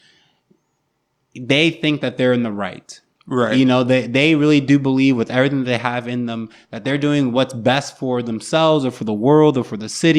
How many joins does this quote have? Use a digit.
0